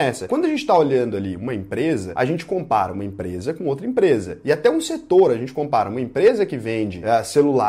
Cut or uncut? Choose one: uncut